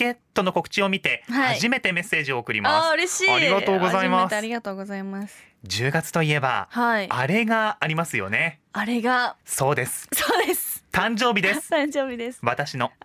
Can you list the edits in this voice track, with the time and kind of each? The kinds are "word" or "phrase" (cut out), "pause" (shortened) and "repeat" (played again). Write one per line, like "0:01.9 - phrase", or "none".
0:09.4 - pause